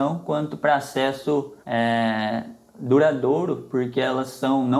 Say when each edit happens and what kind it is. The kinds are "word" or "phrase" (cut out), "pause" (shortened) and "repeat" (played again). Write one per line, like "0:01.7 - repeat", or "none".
0:01.6 - pause